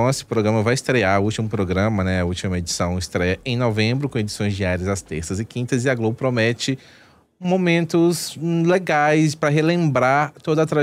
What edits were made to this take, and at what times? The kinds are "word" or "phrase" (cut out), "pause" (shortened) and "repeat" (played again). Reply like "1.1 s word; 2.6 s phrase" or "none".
none